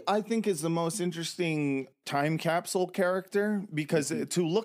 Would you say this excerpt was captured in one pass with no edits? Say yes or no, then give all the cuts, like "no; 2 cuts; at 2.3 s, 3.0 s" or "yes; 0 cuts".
yes; 0 cuts